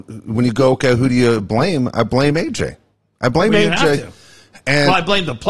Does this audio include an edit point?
no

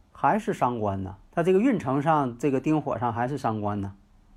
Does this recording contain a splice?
yes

